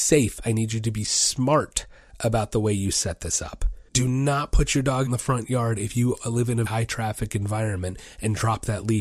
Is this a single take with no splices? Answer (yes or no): no